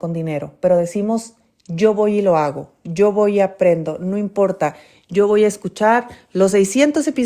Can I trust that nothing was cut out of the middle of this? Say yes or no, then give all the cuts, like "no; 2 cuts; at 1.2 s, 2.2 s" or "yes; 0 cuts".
yes; 0 cuts